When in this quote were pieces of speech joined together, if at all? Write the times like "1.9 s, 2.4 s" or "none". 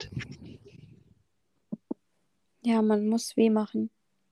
none